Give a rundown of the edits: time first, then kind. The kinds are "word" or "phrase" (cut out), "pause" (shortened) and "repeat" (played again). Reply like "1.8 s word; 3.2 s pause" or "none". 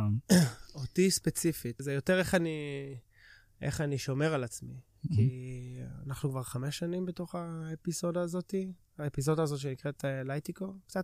1.8 s word